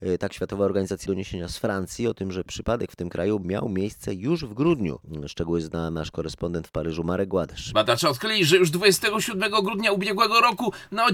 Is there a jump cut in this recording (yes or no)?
yes